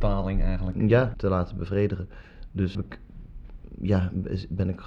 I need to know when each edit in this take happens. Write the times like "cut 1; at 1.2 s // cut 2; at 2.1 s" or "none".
cut 1; at 1.1 s // cut 2; at 2.7 s